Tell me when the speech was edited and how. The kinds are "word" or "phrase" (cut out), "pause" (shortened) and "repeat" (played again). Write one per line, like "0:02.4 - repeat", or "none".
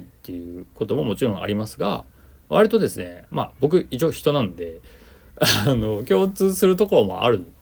none